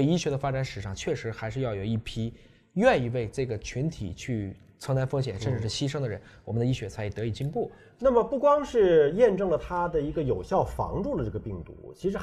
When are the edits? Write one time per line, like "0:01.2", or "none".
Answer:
none

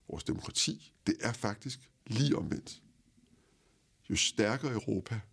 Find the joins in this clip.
0:01.0
0:02.0

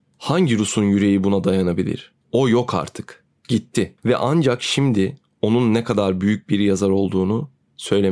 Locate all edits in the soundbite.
0:02.2
0:04.0

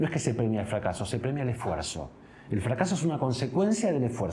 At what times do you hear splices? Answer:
none

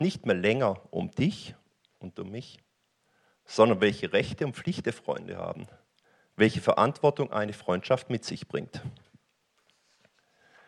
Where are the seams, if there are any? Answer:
0:06.0

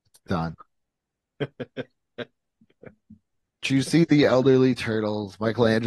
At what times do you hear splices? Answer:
0:03.6

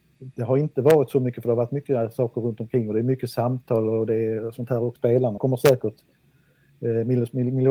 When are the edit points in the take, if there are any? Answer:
0:05.0
0:05.4

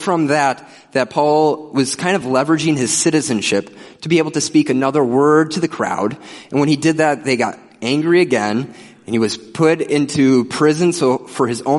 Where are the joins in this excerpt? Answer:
none

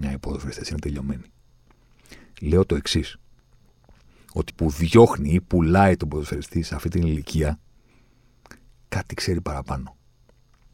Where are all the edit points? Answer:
0:04.5

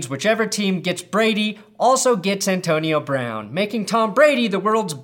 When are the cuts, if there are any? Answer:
none

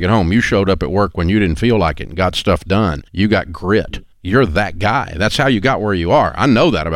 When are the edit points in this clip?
0:03.1
0:04.1

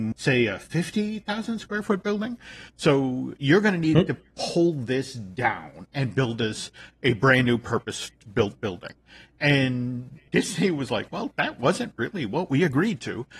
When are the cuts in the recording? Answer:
none

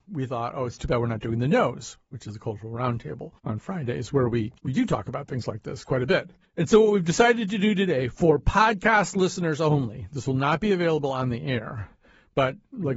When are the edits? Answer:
0:03.4
0:04.6
0:06.4

